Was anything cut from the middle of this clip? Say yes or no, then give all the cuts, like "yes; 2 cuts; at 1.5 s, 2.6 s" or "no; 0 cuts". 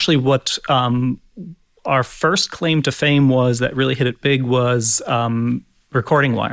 no; 0 cuts